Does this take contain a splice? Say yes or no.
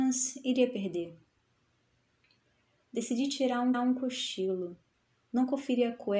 yes